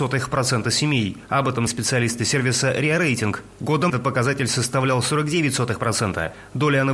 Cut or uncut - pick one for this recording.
cut